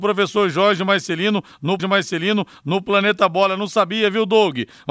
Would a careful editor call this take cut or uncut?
cut